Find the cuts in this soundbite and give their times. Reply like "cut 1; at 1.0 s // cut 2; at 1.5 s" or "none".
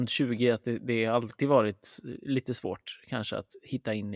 none

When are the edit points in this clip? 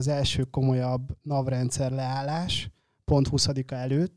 cut 1; at 2.8 s

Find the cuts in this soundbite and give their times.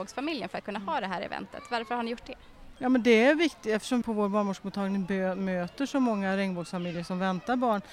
cut 1; at 4.0 s

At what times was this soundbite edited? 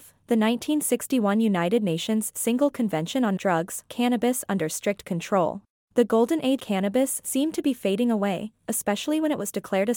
cut 1; at 3.4 s // cut 2; at 3.9 s // cut 3; at 5.7 s // cut 4; at 6.6 s

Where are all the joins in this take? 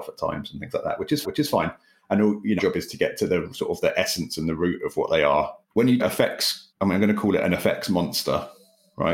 cut 1; at 1.2 s // cut 2; at 2.6 s // cut 3; at 5.6 s // cut 4; at 6.0 s // cut 5; at 6.7 s

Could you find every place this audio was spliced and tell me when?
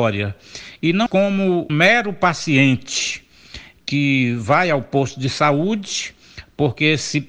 cut 1; at 1.1 s // cut 2; at 1.7 s

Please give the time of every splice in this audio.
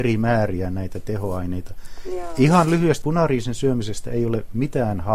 cut 1; at 3.0 s

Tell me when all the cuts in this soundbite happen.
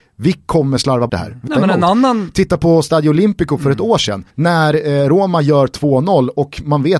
cut 1; at 1.1 s // cut 2; at 1.5 s // cut 3; at 4.3 s

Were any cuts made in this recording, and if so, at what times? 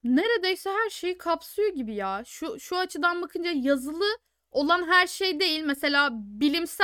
none

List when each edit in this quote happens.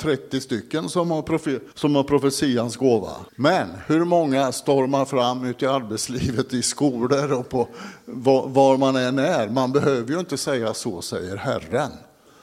cut 1; at 1.7 s // cut 2; at 3.3 s

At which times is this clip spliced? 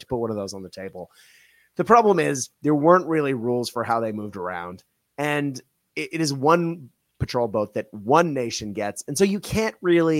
cut 1; at 2.5 s

